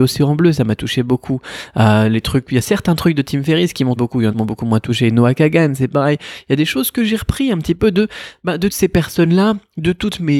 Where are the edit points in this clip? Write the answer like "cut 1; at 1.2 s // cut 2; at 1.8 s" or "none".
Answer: cut 1; at 4.0 s // cut 2; at 4.3 s // cut 3; at 8.7 s